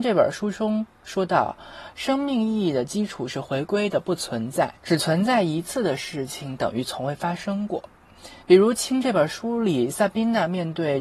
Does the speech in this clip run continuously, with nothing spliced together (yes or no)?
no